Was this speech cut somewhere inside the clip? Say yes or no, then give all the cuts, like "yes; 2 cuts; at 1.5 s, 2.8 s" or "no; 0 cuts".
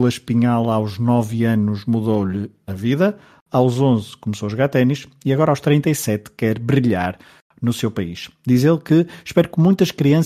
no; 0 cuts